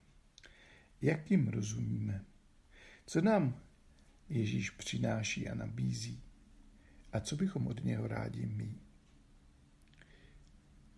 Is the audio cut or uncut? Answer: uncut